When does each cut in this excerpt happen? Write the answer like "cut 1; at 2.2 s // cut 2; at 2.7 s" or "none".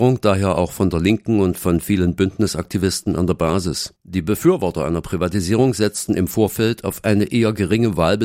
cut 1; at 4.0 s